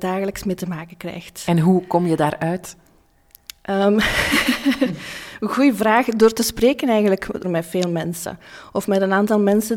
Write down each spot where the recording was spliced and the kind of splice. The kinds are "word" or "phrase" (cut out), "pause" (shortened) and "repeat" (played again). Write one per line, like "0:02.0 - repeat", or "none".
0:07.4 - word